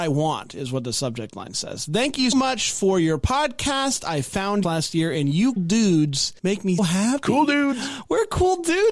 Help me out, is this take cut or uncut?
cut